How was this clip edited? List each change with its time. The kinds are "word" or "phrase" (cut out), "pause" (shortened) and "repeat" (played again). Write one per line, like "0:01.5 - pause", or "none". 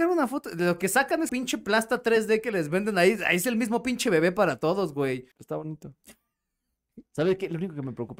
0:01.3 - word
0:05.3 - pause